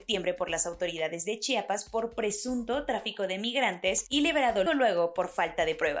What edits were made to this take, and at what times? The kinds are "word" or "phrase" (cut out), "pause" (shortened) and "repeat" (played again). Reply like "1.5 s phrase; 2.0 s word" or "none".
4.7 s word